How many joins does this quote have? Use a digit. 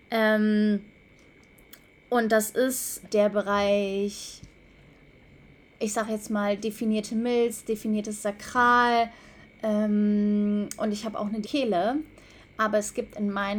2